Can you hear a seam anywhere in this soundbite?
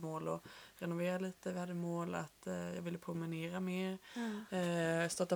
no; 0 cuts

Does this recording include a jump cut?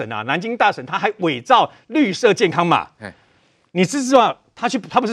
no; 0 cuts

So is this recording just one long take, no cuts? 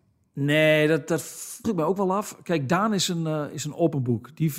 no; 1 cut; at 1.6 s

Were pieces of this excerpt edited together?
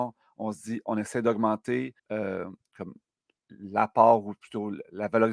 yes; 1 cut; at 2.0 s

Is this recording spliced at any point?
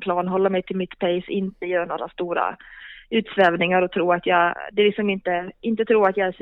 no; 0 cuts

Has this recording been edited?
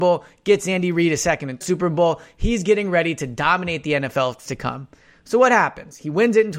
yes; 2 cuts; at 1.6 s, 4.5 s

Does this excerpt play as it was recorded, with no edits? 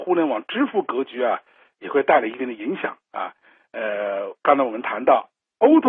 no; 1 cut; at 4.4 s

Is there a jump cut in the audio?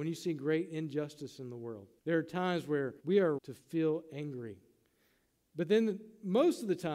yes; 3 cuts; at 2.0 s, 3.0 s, 3.4 s

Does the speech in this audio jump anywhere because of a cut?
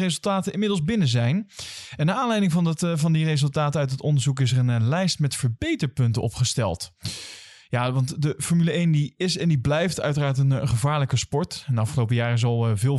no; 0 cuts

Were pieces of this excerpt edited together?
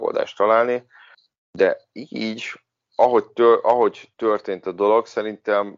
yes; 2 cuts; at 1.1 s, 4.1 s

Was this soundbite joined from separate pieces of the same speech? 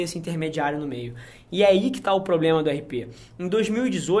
no; 0 cuts

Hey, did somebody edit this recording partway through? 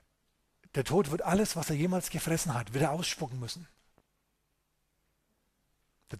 no; 0 cuts

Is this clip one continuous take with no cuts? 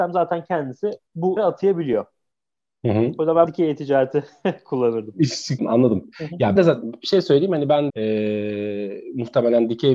no; 6 cuts; at 1.0 s, 1.4 s, 3.5 s, 5.6 s, 6.6 s, 7.9 s

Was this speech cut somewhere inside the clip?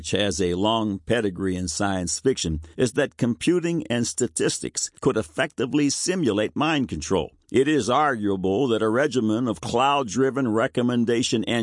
yes; 3 cuts; at 2.7 s, 4.9 s, 7.4 s

